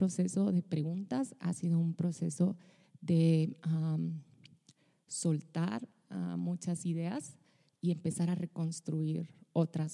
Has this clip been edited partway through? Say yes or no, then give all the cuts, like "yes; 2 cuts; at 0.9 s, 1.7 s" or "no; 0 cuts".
no; 0 cuts